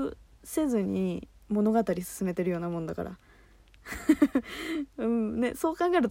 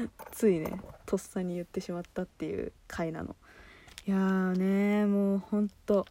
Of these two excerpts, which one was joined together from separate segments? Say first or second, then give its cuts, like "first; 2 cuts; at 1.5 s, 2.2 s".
second; 1 cut; at 2.8 s